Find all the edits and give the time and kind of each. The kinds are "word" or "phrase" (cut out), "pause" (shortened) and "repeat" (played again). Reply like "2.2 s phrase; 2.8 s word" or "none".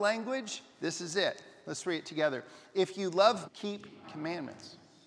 3.4 s word; 4.0 s word